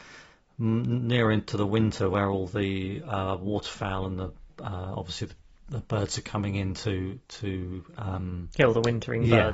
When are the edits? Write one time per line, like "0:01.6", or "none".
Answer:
none